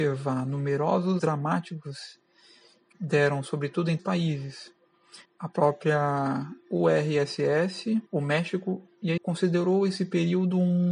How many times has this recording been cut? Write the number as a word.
six